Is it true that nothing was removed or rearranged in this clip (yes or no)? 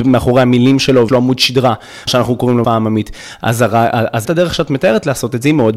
no